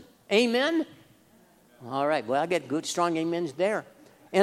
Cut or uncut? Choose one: uncut